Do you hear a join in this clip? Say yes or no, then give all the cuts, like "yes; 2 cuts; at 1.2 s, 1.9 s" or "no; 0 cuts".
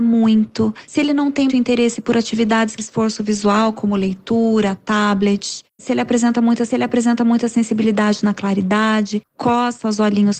yes; 3 cuts; at 1.5 s, 2.8 s, 6.7 s